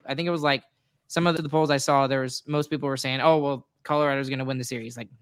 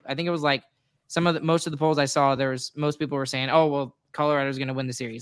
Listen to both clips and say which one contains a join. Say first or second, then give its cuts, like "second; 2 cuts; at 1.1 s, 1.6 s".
first; 1 cut; at 1.4 s